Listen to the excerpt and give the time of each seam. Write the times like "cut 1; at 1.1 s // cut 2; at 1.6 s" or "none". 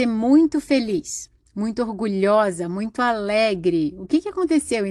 none